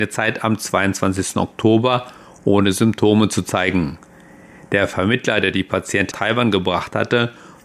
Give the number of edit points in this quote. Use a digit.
1